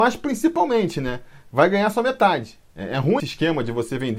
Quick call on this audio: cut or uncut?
cut